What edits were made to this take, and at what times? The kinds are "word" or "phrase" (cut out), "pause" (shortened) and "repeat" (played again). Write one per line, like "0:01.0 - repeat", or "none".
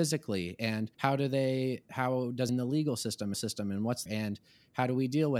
0:00.9 - pause
0:02.5 - phrase
0:03.3 - repeat
0:04.1 - phrase

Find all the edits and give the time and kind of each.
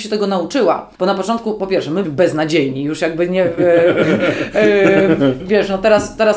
0:00.9 - pause
0:02.0 - word
0:05.4 - word

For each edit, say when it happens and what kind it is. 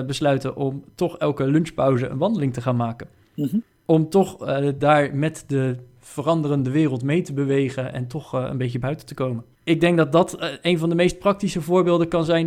0:09.5 - pause

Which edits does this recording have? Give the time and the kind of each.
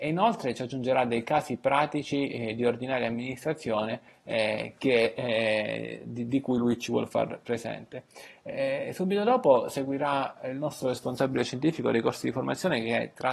none

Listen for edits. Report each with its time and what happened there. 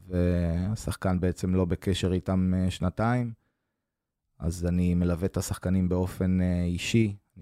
none

